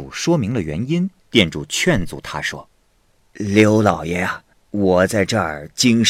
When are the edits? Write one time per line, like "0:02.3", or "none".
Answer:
0:01.2
0:02.8
0:04.5